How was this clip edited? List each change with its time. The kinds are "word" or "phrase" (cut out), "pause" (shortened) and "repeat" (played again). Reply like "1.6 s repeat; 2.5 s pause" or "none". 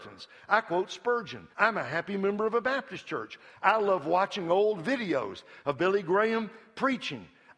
1.5 s pause